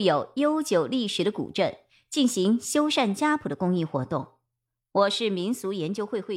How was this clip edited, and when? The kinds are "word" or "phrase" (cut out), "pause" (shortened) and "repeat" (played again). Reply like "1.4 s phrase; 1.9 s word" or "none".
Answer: none